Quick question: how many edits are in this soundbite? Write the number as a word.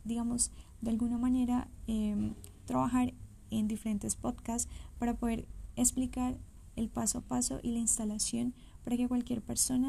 zero